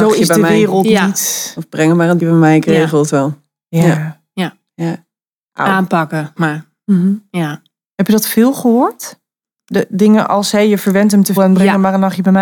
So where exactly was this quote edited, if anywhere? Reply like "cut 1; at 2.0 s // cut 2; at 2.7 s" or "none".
cut 1; at 2.2 s // cut 2; at 6.4 s // cut 3; at 11.4 s